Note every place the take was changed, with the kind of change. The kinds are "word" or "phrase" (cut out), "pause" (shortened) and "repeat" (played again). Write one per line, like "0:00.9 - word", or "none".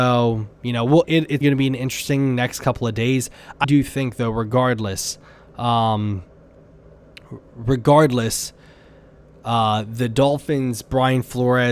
0:01.0 - word
0:01.4 - word
0:03.6 - word